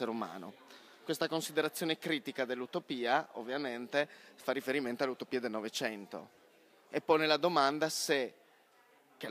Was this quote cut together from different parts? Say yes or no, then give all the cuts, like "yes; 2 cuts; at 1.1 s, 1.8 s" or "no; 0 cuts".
no; 0 cuts